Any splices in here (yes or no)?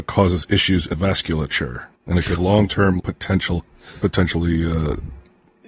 yes